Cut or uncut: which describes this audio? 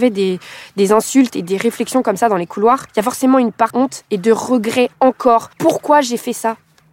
cut